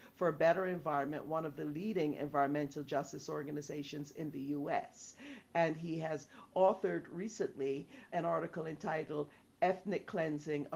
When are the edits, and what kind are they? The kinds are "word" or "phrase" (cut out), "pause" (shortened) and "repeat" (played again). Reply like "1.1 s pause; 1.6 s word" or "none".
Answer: 8.1 s word